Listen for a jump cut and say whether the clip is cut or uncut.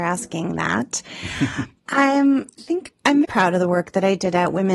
cut